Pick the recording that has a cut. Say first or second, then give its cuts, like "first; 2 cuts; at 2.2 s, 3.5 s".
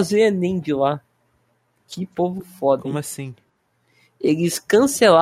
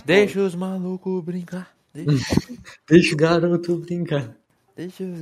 second; 1 cut; at 3.1 s